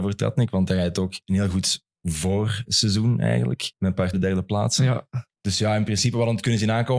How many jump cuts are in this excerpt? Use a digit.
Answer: 5